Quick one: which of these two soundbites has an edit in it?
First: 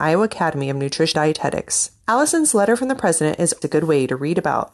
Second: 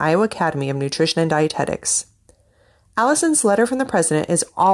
first; 3 cuts; at 1.1 s, 2.0 s, 3.6 s

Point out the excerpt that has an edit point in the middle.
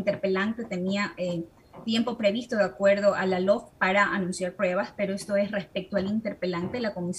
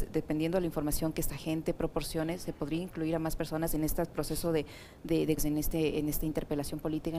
second; 1 cut; at 5.4 s

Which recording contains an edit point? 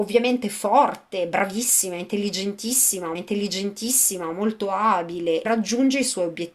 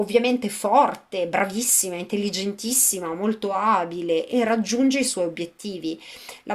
first; 2 cuts; at 3.1 s, 5.4 s

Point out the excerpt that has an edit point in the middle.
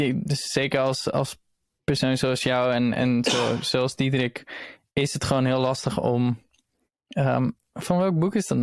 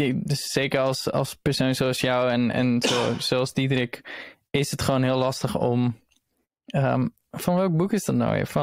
second; 1 cut; at 1.4 s

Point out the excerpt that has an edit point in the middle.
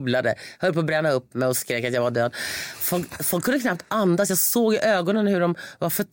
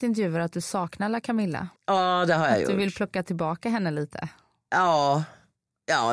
second; 1 cut; at 1.8 s

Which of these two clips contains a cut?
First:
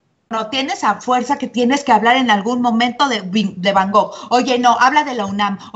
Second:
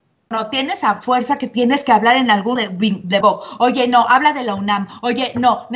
second; 2 cuts; at 2.6 s, 3.2 s

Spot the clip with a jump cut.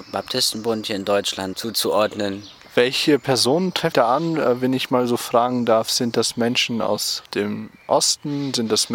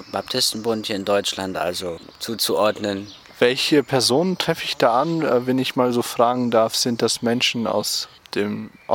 first; 3 cuts; at 1.5 s, 3.9 s, 7.2 s

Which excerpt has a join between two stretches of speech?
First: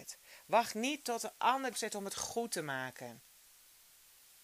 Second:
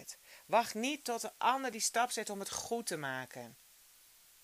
first; 1 cut; at 1.7 s

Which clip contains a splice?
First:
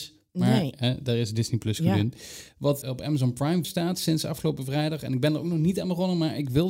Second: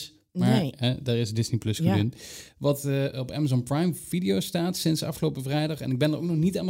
first; 2 cuts; at 2.8 s, 3.6 s

